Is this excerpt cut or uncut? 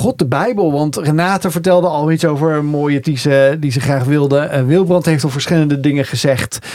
cut